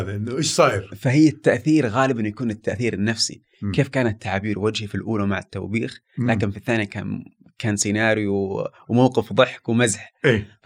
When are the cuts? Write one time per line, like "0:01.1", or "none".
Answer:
none